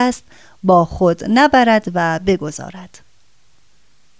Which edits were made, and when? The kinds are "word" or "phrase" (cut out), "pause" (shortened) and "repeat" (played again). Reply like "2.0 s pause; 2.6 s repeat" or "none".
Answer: none